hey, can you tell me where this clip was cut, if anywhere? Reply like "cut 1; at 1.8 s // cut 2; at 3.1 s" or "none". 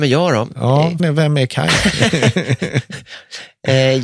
cut 1; at 1.0 s

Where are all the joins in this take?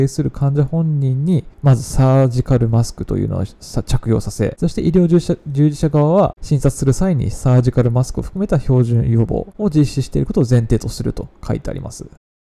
cut 1; at 1.5 s

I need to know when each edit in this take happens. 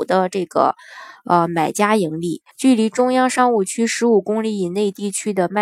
cut 1; at 2.5 s

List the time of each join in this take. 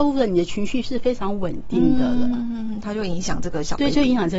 none

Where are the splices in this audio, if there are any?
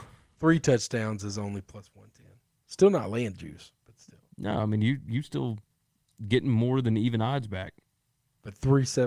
none

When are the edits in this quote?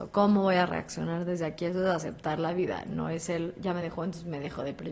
none

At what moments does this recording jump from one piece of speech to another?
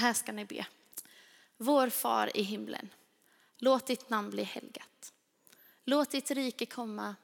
none

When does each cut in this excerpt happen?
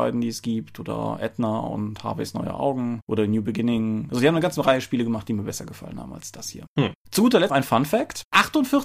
cut 1; at 7.5 s

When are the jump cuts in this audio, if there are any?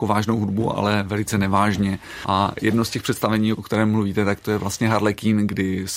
none

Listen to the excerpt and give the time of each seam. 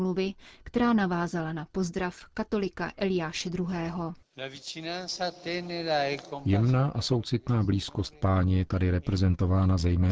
none

